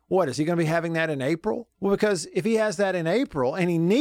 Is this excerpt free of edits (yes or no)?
no